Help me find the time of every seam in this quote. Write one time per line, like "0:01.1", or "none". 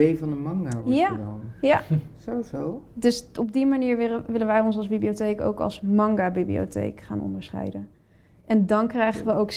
none